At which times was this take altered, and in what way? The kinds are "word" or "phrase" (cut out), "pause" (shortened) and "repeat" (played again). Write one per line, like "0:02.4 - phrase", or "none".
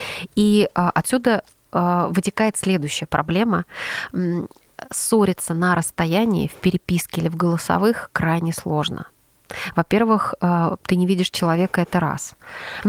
none